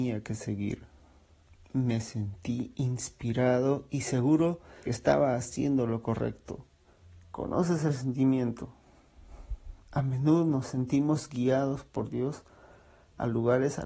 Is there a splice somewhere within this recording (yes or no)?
yes